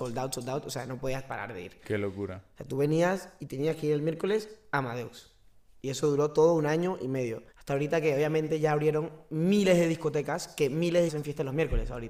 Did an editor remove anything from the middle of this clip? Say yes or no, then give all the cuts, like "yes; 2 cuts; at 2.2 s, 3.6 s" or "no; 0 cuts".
yes; 2 cuts; at 7.5 s, 11.1 s